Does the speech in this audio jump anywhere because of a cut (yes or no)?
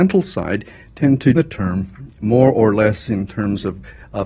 yes